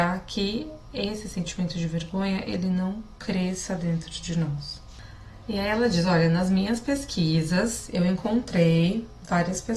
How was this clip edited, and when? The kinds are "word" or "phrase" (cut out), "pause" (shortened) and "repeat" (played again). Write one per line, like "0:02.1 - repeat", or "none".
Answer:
none